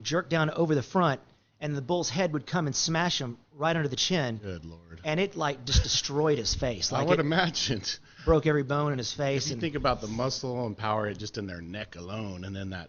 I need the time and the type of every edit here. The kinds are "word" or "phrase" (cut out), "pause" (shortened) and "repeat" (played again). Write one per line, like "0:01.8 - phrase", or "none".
none